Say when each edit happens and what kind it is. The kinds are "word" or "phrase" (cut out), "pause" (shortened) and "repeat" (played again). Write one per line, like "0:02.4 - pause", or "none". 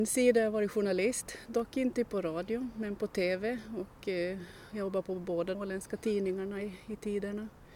0:05.5 - word